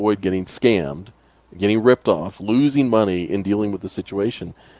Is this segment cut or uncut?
uncut